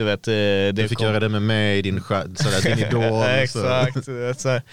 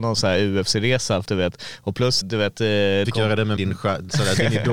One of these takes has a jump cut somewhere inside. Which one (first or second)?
second